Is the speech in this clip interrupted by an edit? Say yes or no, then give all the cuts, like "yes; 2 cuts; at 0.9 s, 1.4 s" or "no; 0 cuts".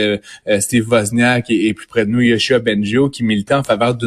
no; 0 cuts